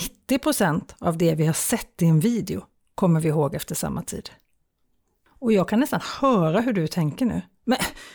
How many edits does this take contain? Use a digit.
0